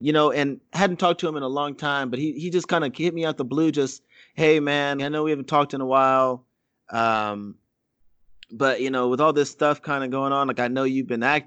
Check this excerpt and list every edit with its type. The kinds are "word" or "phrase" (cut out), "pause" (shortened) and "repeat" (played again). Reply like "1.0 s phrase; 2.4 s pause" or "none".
5.0 s word